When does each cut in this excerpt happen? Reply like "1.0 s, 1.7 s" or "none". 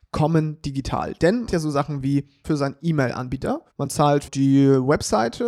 1.5 s, 2.4 s, 3.7 s, 4.3 s